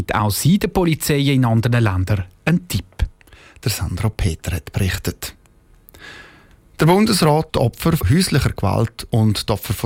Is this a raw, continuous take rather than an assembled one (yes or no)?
no